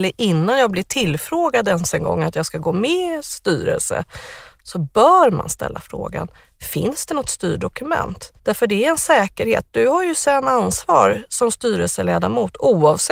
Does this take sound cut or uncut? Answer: cut